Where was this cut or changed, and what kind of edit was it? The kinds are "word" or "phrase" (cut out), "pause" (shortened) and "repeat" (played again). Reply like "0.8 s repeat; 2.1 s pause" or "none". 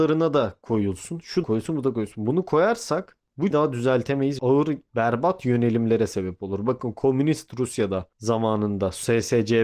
1.4 s word; 3.5 s phrase; 4.4 s phrase

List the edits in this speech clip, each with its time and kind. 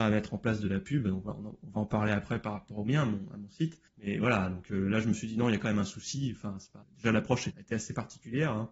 3.9 s pause; 6.8 s pause; 7.5 s word

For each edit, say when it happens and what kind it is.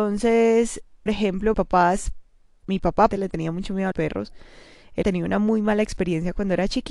1.1 s word; 1.5 s word; 2.6 s word; 3.1 s word; 3.9 s word; 5.0 s word

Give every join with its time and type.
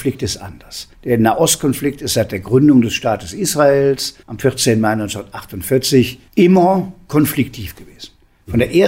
0.9 s pause; 4.2 s pause; 6.3 s pause

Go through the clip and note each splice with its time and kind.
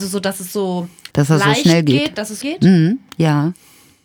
1.1 s pause; 2.4 s word

